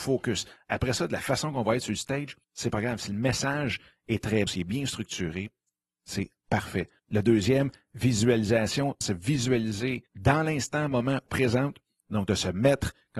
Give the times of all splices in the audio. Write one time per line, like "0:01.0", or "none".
0:02.4
0:04.5
0:07.0
0:09.0
0:10.1
0:11.3